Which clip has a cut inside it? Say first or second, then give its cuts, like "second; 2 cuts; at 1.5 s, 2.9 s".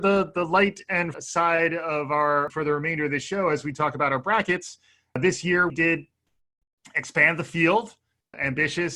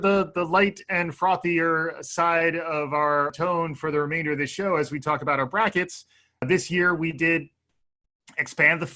first; 3 cuts; at 1.1 s, 2.5 s, 5.7 s